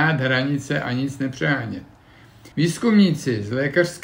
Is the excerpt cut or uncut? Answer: cut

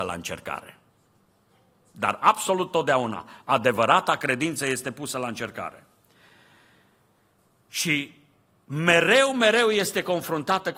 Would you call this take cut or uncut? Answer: uncut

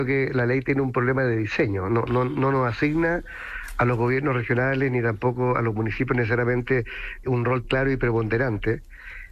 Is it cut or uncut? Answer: cut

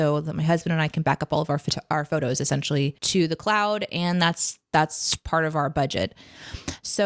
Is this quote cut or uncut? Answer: cut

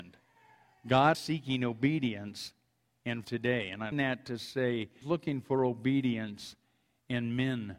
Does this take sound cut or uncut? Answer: cut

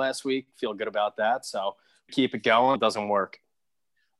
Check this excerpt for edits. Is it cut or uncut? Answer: cut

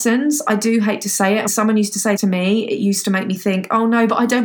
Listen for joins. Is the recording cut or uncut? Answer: cut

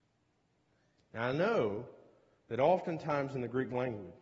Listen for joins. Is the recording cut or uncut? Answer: uncut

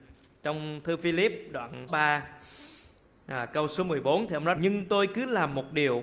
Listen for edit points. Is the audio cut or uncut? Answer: cut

